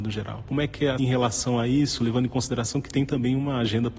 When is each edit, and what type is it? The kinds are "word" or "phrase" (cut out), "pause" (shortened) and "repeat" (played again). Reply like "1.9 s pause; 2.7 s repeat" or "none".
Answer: 1.0 s phrase